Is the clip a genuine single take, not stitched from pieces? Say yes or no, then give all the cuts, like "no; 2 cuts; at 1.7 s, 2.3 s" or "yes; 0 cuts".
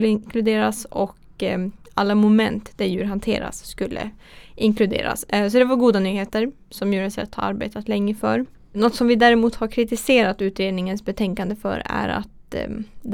yes; 0 cuts